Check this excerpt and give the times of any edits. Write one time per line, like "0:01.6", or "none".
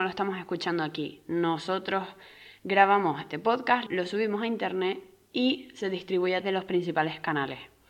0:03.3
0:03.9
0:06.4